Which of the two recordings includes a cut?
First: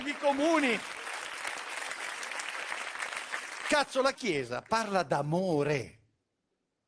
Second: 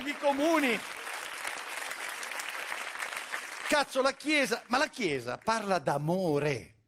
first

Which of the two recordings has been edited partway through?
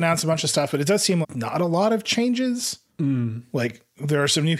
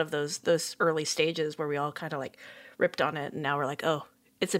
first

